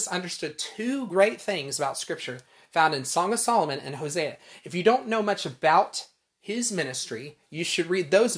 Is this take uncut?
yes; 0 cuts

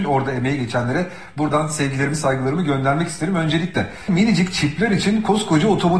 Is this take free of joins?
yes; 0 cuts

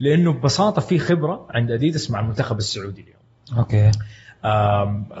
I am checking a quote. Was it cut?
no; 0 cuts

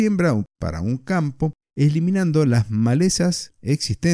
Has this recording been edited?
no; 0 cuts

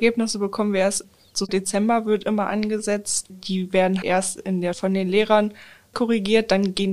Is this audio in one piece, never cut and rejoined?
no; 5 cuts; at 1.5 s, 3.3 s, 4.0 s, 4.7 s, 5.9 s

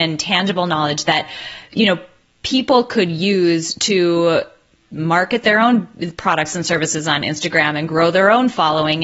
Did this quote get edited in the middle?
no; 0 cuts

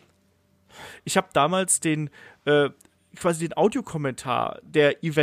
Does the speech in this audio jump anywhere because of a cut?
no; 0 cuts

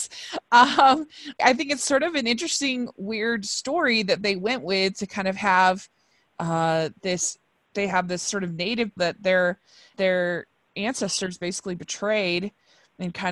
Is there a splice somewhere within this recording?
yes; 4 cuts; at 1.4 s, 7.7 s, 9.0 s, 9.9 s

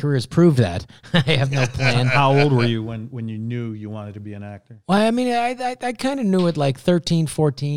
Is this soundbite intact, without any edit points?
yes; 0 cuts

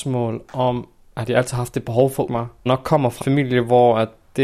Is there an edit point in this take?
yes; 3 cuts; at 2.3 s, 2.7 s, 3.2 s

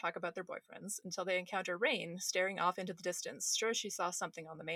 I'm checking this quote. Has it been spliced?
no; 0 cuts

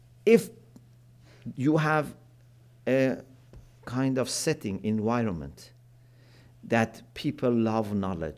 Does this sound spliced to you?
no; 0 cuts

